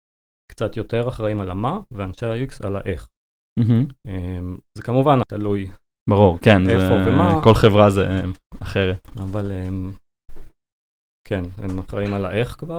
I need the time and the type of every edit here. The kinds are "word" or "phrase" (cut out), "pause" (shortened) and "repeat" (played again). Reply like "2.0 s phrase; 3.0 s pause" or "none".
5.2 s phrase